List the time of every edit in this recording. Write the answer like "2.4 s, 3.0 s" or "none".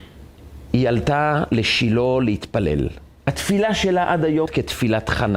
4.5 s